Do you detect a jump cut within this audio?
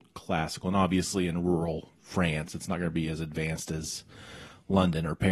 yes; 1 cut; at 2.0 s

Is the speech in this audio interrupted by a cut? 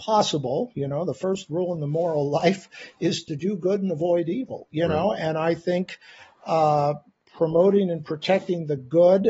no; 0 cuts

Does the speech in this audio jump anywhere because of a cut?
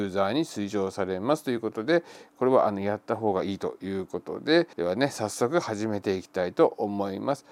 yes; 1 cut; at 4.7 s

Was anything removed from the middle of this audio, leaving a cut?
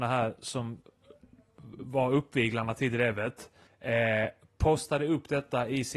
yes; 1 cut; at 3.7 s

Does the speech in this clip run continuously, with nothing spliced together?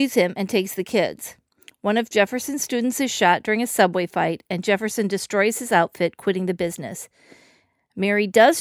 yes; 0 cuts

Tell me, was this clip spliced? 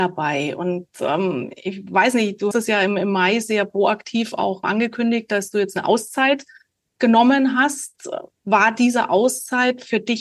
yes; 3 cuts; at 2.5 s, 4.6 s, 8.3 s

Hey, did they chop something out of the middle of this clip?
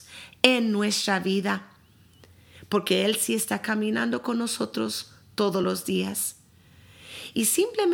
no; 0 cuts

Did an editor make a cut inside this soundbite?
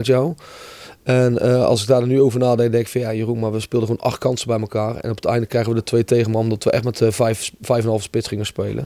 no; 0 cuts

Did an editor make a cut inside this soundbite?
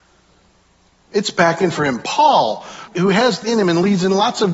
yes; 3 cuts; at 1.8 s, 2.9 s, 3.4 s

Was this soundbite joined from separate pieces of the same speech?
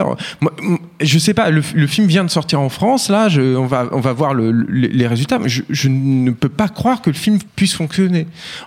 yes; 1 cut; at 7.5 s

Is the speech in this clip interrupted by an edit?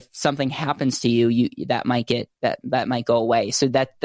yes; 1 cut; at 2.3 s

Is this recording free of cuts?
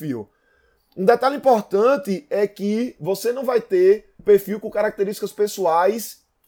no; 1 cut; at 4.2 s

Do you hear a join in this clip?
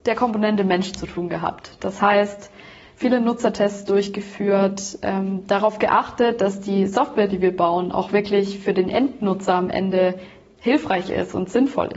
no; 0 cuts

